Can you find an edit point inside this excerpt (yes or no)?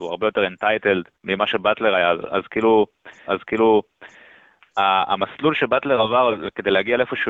yes